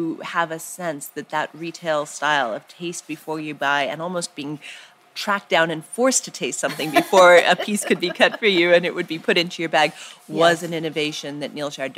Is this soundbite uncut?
yes; 0 cuts

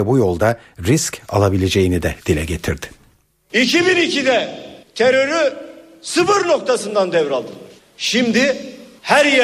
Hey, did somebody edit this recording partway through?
no; 0 cuts

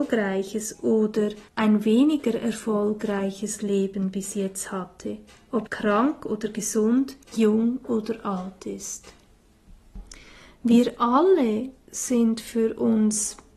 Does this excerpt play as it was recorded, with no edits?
no; 3 cuts; at 1.5 s, 5.7 s, 7.2 s

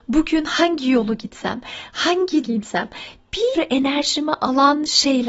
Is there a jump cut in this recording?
yes; 2 cuts; at 2.4 s, 3.5 s

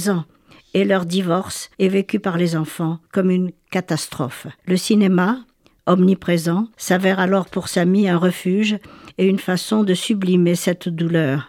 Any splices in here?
yes; 4 cuts; at 1.7 s, 3.0 s, 4.6 s, 6.7 s

